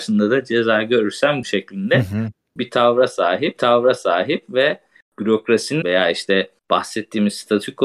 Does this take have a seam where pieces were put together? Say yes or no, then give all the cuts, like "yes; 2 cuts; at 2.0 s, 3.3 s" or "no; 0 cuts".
yes; 4 cuts; at 1.4 s, 3.6 s, 5.8 s, 6.6 s